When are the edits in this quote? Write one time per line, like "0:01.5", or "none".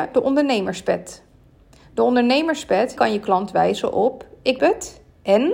0:03.0
0:04.6